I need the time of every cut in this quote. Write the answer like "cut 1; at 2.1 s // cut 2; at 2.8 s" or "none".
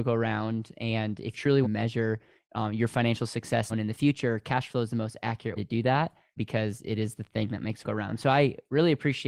cut 1; at 1.3 s // cut 2; at 1.6 s // cut 3; at 3.7 s // cut 4; at 5.5 s // cut 5; at 6.4 s // cut 6; at 7.8 s